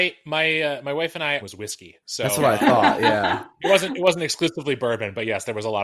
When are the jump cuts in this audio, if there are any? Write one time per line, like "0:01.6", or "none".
0:01.4